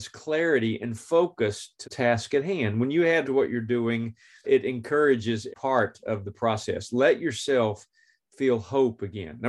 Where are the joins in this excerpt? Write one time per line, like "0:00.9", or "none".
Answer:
0:01.8
0:03.2
0:04.4
0:05.5